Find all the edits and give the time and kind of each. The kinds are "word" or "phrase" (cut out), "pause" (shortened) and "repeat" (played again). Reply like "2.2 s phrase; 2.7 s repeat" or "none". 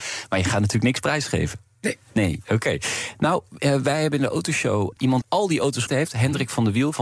5.2 s word; 5.9 s word